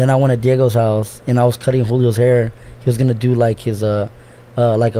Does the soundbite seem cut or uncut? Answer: uncut